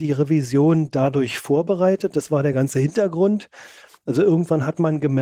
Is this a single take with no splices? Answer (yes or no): yes